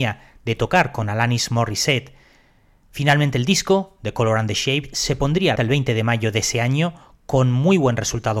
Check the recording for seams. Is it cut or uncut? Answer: cut